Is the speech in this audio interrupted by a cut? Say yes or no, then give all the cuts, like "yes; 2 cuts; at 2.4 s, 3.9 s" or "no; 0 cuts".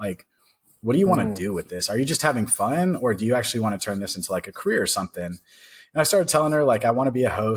no; 0 cuts